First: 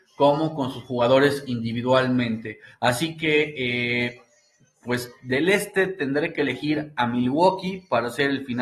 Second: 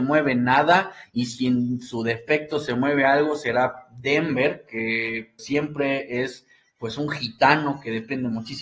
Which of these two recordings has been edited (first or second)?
second